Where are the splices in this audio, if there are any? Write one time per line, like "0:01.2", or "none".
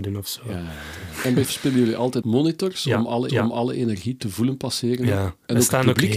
0:01.4
0:02.2
0:03.3